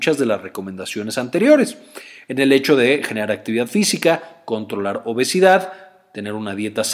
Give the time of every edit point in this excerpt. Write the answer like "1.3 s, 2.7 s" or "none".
none